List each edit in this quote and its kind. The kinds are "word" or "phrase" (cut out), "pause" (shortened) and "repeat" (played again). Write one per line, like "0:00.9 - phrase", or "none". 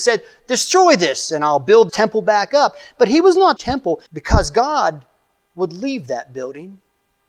0:01.9 - word
0:03.6 - phrase
0:04.1 - pause